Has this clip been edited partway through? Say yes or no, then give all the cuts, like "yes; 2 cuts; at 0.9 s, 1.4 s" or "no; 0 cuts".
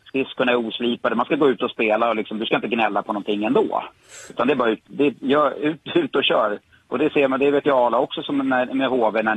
no; 0 cuts